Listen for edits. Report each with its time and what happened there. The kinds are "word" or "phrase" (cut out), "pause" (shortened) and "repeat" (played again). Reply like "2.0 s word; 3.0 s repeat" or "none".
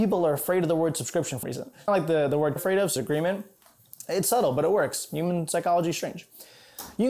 1.4 s word; 1.9 s word; 2.6 s phrase; 3.0 s word

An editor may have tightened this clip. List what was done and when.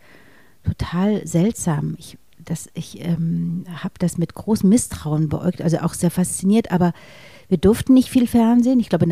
none

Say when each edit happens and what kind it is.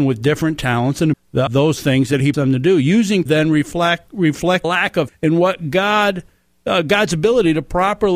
1.1 s phrase; 1.5 s word; 2.3 s word; 3.3 s phrase; 4.6 s phrase; 5.1 s word

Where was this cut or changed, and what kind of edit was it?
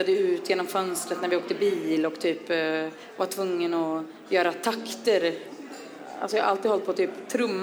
none

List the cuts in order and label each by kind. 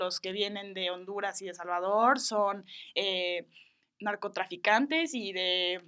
none

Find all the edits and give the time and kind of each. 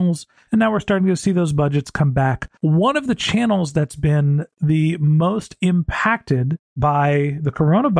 2.6 s pause

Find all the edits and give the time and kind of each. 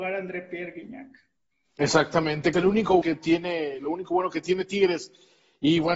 2.5 s phrase; 3.0 s word

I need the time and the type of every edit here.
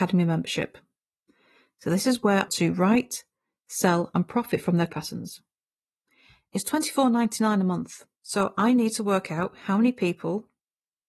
2.5 s phrase; 4.9 s word; 8.2 s pause

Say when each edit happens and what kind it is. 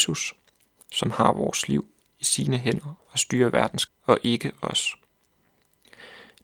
3.9 s word

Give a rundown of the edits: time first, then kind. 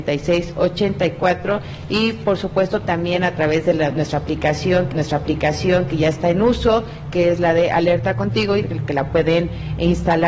4.9 s repeat

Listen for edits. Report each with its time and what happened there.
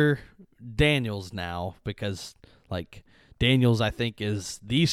none

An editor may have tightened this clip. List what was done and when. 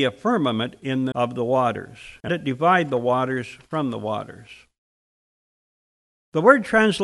1.1 s word; 2.3 s word

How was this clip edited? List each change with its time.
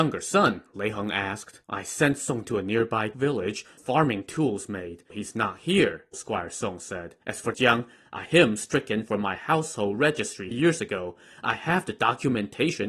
1.6 s pause; 2.4 s word; 3.8 s phrase; 5.1 s word; 6.1 s word; 7.2 s pause; 7.5 s phrase; 8.3 s word; 10.5 s word

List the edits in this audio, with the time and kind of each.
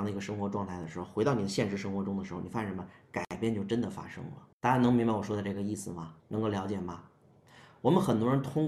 4.5 s pause; 6.2 s pause

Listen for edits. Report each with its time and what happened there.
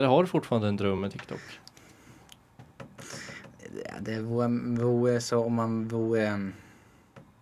none

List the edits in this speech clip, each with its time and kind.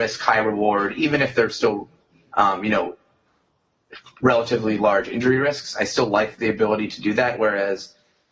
none

